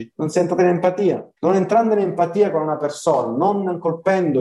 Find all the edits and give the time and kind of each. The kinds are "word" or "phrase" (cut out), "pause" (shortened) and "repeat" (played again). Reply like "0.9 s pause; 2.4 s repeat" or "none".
1.4 s pause